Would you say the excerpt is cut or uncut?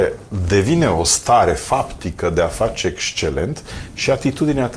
uncut